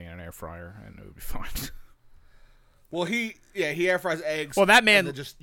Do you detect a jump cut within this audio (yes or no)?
no